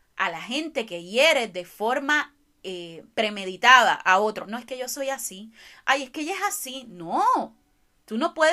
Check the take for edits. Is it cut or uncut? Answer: cut